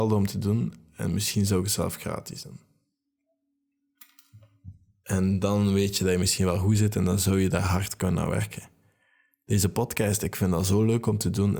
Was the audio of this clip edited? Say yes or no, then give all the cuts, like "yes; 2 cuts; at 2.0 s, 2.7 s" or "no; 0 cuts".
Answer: no; 0 cuts